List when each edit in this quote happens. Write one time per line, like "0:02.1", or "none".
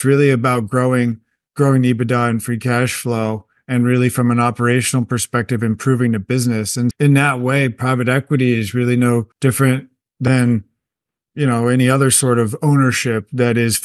0:06.9
0:09.3